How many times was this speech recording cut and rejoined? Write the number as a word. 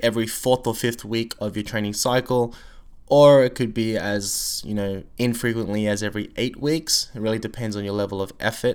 zero